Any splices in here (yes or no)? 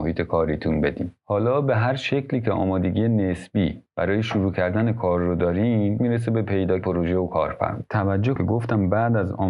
yes